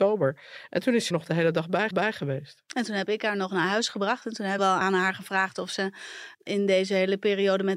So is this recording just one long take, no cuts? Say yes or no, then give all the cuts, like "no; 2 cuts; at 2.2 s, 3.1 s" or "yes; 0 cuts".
no; 4 cuts; at 1.1 s, 1.9 s, 4.6 s, 6.3 s